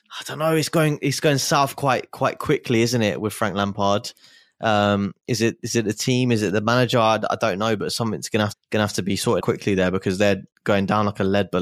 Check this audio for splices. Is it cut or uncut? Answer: cut